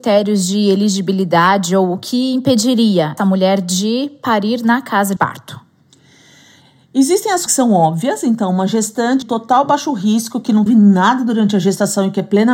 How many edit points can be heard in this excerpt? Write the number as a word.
five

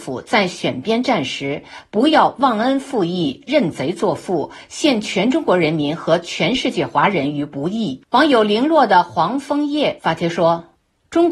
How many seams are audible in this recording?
one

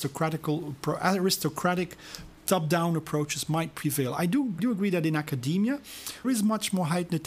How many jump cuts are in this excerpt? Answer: three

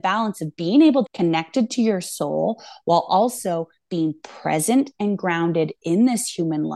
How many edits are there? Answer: one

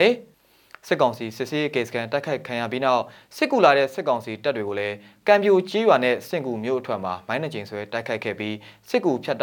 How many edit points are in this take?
zero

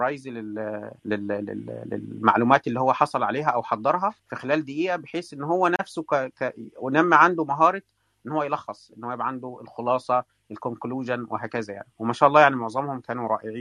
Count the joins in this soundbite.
two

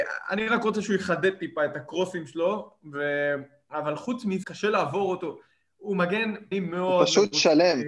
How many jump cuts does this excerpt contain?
two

